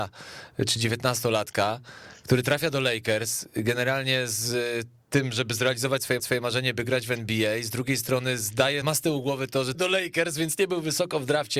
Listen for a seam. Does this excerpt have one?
yes; 3 cuts; at 6.2 s, 8.8 s, 9.7 s

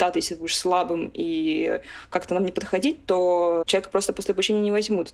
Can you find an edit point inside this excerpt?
no; 0 cuts

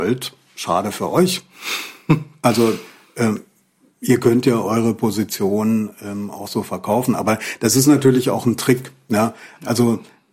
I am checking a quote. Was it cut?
no; 0 cuts

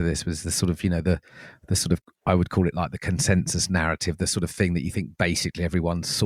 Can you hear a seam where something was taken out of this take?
no; 0 cuts

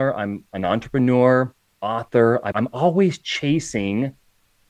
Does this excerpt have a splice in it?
yes; 1 cut; at 2.5 s

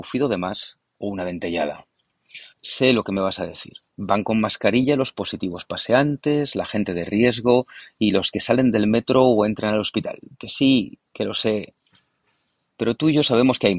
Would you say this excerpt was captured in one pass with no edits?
no; 4 cuts; at 0.9 s, 2.5 s, 3.9 s, 11.1 s

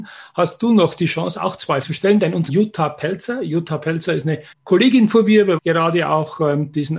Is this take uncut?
no; 4 cuts; at 1.8 s, 2.5 s, 4.5 s, 5.6 s

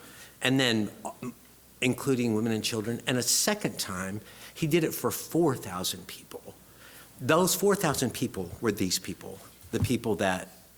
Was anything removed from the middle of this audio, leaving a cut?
no; 0 cuts

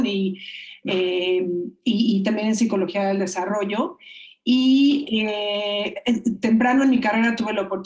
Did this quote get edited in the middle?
no; 0 cuts

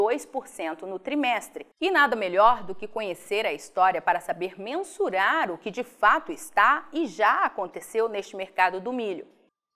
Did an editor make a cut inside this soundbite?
yes; 1 cut; at 1.7 s

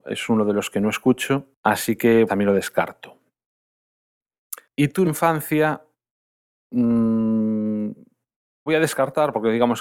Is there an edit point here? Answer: yes; 5 cuts; at 1.6 s, 2.3 s, 4.6 s, 5.0 s, 8.7 s

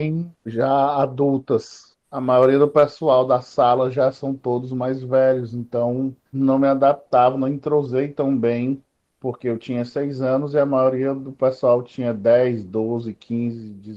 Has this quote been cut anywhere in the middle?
yes; 2 cuts; at 6.3 s, 8.9 s

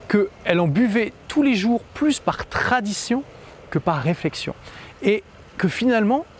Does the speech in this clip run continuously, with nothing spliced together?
no; 1 cut; at 5.5 s

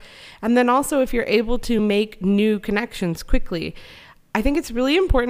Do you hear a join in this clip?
no; 0 cuts

